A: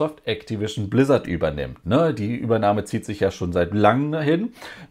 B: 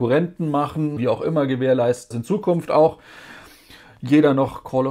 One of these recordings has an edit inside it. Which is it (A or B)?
B